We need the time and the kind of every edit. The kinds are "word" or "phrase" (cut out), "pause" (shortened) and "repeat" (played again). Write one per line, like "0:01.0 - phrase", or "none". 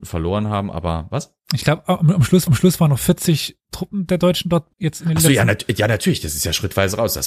0:01.4 - pause
0:02.5 - repeat
0:04.7 - pause